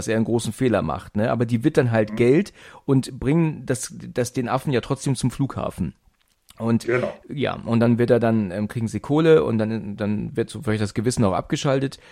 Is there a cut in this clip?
no; 0 cuts

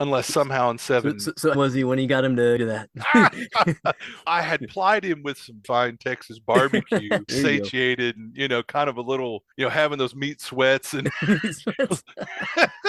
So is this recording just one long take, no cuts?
no; 6 cuts; at 1.5 s, 2.6 s, 4.3 s, 5.6 s, 7.3 s, 9.5 s

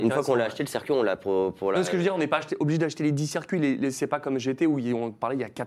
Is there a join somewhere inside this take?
no; 0 cuts

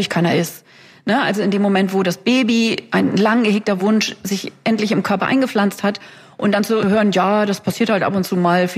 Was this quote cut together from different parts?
no; 0 cuts

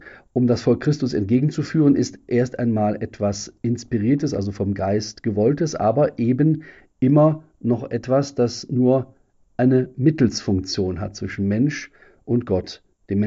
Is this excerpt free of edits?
yes; 0 cuts

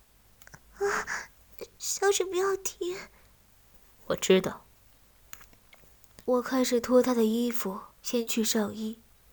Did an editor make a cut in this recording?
yes; 2 cuts; at 6.2 s, 8.0 s

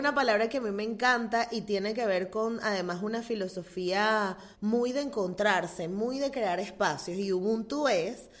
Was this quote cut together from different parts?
yes; 1 cut; at 4.5 s

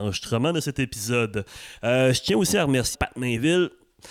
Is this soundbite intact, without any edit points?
no; 1 cut; at 2.9 s

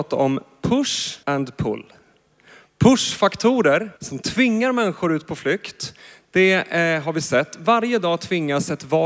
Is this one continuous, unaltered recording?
no; 2 cuts; at 1.2 s, 4.0 s

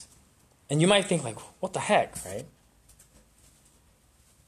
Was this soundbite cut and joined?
no; 0 cuts

